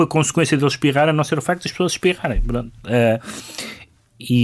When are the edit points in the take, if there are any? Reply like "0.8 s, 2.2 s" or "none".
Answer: none